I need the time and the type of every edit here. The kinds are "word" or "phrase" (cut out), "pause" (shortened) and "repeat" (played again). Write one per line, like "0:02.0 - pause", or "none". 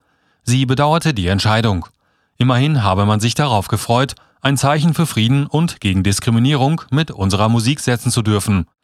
none